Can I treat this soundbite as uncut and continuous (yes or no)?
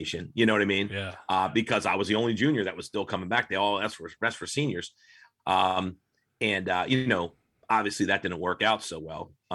yes